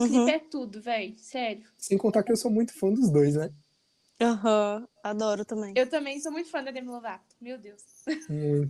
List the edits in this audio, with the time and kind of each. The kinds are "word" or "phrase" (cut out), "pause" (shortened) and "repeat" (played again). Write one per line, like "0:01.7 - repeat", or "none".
none